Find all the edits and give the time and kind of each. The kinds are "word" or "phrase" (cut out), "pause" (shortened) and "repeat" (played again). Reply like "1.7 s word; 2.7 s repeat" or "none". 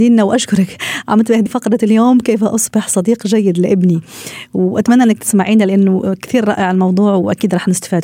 1.5 s word